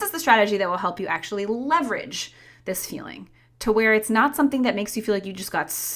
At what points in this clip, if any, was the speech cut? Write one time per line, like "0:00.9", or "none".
none